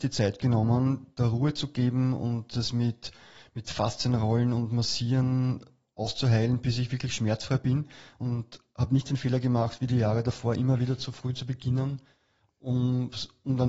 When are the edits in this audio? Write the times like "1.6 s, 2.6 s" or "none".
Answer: none